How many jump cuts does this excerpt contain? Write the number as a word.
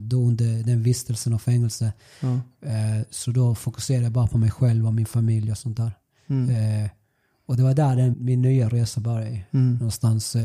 one